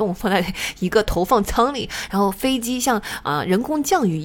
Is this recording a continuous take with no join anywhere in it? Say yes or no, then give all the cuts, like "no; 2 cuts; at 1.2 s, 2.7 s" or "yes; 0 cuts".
yes; 0 cuts